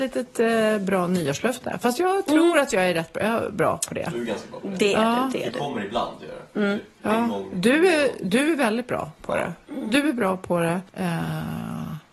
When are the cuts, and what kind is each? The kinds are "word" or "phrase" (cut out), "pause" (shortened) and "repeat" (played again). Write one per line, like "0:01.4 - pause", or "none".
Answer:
0:10.9 - pause